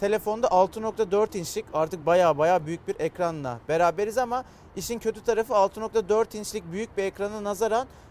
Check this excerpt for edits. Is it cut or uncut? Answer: uncut